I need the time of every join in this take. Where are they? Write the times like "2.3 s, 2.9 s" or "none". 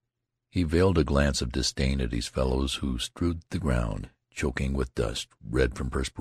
none